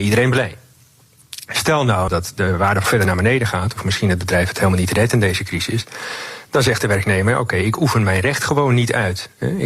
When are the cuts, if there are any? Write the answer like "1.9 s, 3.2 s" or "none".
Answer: 2.8 s